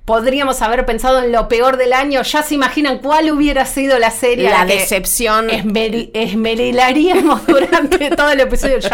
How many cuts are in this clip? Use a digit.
0